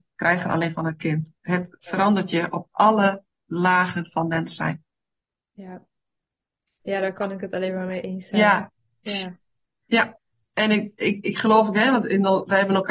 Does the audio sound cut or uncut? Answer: uncut